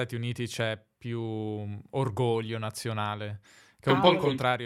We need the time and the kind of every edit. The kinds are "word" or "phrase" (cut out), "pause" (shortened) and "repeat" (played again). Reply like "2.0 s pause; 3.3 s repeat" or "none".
none

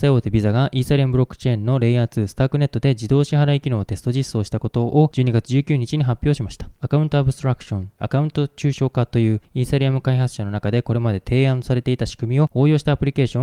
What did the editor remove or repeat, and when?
8.0 s word

